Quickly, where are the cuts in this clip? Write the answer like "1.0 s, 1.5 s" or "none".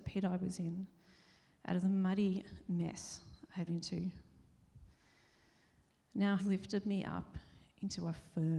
3.7 s, 6.4 s